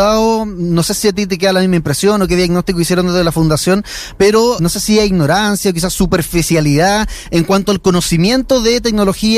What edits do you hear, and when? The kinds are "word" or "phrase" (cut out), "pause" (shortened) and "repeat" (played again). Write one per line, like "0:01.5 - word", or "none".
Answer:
0:04.6 - word